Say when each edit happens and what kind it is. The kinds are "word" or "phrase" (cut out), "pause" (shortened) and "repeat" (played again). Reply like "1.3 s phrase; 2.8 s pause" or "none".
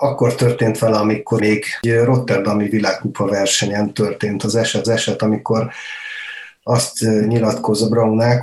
1.4 s word; 4.8 s repeat